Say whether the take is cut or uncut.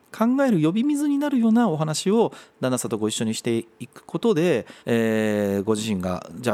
cut